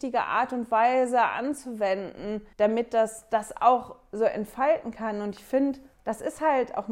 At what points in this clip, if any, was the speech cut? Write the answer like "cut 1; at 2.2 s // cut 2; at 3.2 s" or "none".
cut 1; at 2.5 s // cut 2; at 5.9 s

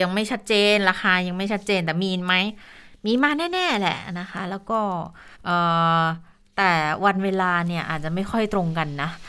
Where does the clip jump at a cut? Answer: cut 1; at 5.3 s

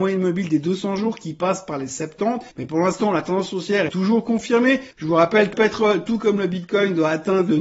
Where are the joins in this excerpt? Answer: cut 1; at 2.5 s // cut 2; at 3.9 s // cut 3; at 4.9 s // cut 4; at 5.5 s

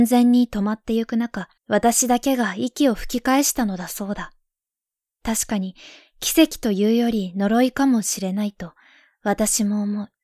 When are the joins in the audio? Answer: cut 1; at 1.6 s

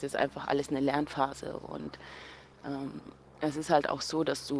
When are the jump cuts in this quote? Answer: none

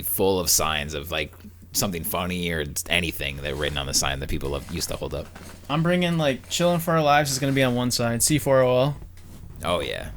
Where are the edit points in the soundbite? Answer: none

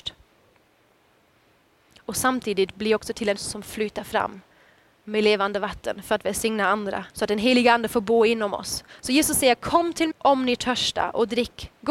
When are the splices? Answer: cut 1; at 3.4 s // cut 2; at 7.1 s // cut 3; at 10.1 s

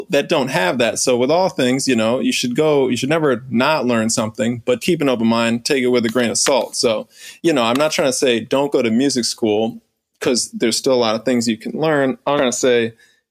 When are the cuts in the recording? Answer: cut 1; at 4.8 s // cut 2; at 7.4 s // cut 3; at 12.4 s

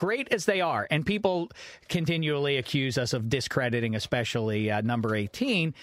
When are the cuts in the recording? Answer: none

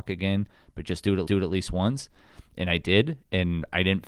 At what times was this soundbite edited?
cut 1; at 1.3 s

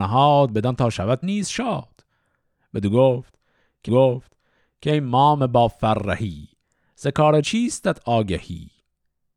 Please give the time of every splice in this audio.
cut 1; at 1.2 s // cut 2; at 3.9 s // cut 3; at 7.4 s

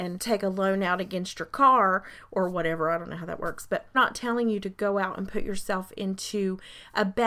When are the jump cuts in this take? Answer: cut 1; at 3.9 s

